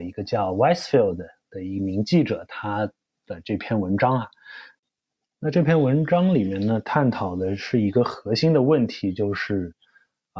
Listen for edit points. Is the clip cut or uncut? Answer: uncut